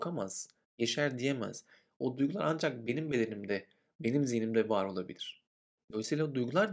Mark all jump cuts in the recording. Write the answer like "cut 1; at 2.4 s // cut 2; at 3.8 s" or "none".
none